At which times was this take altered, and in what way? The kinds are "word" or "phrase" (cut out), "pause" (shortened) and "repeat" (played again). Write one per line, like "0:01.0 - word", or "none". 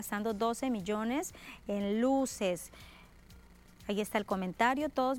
none

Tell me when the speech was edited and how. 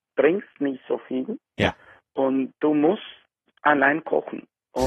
none

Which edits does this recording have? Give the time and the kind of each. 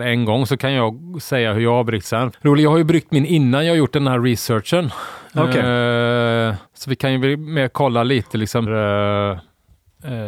0:02.3 - word
0:06.7 - pause
0:08.7 - word

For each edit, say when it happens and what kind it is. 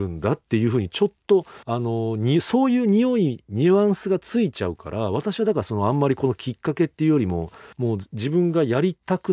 0:01.6 - pause
0:07.7 - pause

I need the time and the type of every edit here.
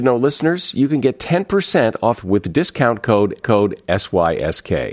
0:02.2 - phrase
0:03.4 - repeat

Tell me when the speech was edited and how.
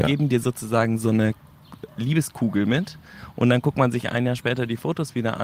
none

